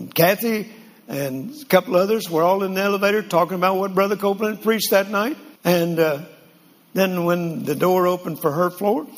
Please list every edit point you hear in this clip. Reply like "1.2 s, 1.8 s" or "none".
5.6 s